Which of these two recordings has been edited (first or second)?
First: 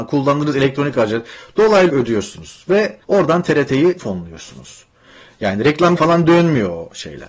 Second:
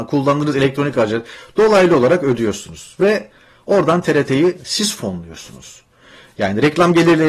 first